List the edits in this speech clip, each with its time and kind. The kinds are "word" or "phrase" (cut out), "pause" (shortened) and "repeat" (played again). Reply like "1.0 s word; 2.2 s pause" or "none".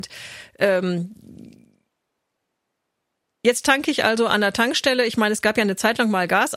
none